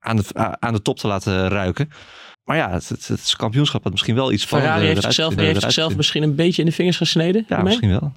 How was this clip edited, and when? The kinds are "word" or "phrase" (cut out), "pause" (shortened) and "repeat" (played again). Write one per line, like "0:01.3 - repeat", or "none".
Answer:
0:02.3 - pause
0:05.4 - repeat